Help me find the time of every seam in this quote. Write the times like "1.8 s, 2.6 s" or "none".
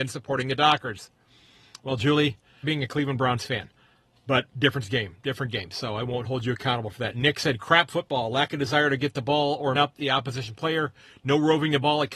2.6 s, 4.5 s, 9.7 s